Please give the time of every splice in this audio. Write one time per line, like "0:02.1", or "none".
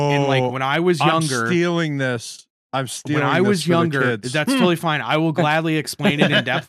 none